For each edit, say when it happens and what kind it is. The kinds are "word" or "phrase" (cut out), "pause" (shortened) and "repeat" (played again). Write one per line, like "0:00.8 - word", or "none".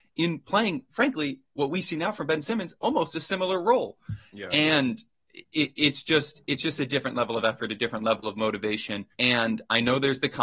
0:09.1 - pause